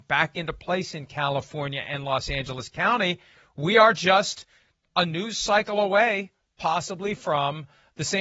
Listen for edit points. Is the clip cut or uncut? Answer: uncut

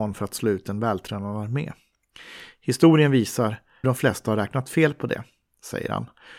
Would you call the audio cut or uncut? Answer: cut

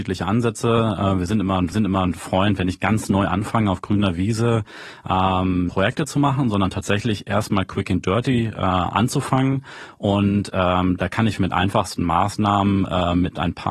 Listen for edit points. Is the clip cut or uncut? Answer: cut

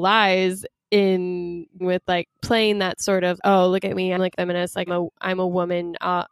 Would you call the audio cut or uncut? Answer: cut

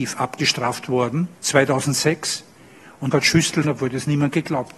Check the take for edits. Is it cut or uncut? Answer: cut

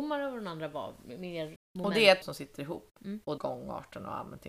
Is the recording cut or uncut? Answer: cut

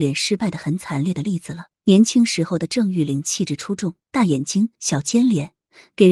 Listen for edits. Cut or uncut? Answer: cut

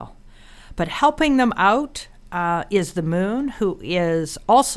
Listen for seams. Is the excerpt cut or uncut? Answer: uncut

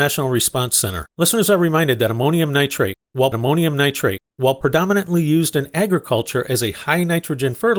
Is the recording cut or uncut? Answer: cut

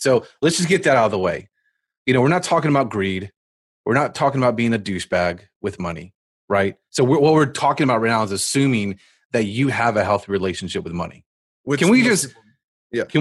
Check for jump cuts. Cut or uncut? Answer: uncut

